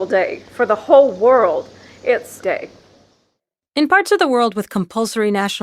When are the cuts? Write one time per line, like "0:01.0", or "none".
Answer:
0:02.4